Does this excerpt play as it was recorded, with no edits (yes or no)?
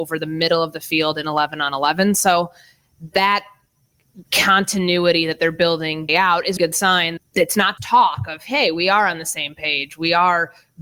no